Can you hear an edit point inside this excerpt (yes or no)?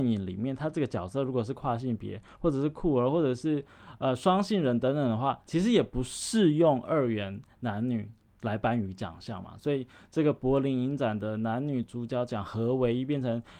no